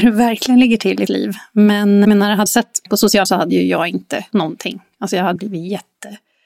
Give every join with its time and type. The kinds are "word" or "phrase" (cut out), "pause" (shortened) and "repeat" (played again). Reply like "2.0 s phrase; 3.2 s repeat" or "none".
1.1 s word; 2.0 s word; 2.5 s word; 2.9 s word; 3.2 s word; 4.3 s word; 5.4 s word

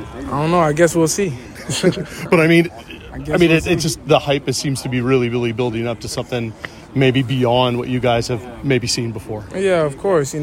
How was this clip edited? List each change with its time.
none

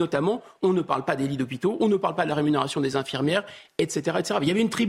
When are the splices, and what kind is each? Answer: none

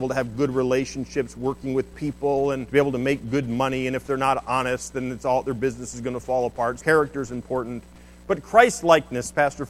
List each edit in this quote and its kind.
2.7 s word; 6.8 s word

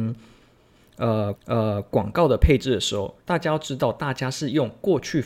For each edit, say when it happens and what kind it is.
1.4 s repeat; 3.2 s pause

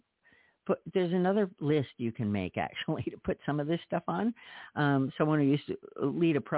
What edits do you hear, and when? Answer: none

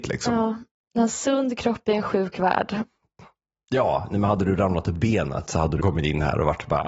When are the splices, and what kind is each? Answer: 4.9 s word; 5.8 s word

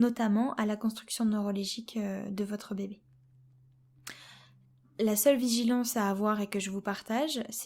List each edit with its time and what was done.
none

